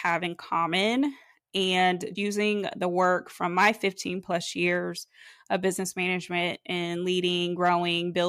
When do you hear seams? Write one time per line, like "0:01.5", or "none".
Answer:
0:02.1